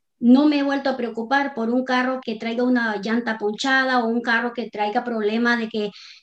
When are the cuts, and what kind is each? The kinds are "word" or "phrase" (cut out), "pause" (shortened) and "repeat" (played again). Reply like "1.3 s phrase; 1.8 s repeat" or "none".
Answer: 2.2 s word